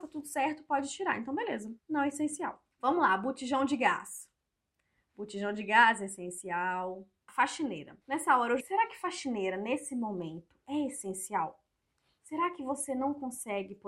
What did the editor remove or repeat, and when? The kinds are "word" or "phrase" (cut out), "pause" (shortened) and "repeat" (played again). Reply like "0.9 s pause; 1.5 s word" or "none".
1.8 s pause; 2.7 s pause; 8.0 s pause; 8.6 s phrase